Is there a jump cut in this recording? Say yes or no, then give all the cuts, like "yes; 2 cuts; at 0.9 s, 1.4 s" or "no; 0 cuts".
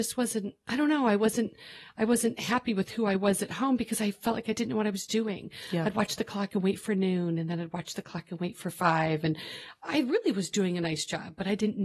no; 0 cuts